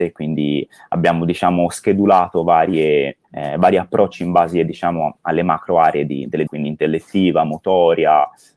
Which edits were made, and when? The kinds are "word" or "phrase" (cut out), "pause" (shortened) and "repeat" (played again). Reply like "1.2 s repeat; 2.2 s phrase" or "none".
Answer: 3.2 s pause; 6.5 s word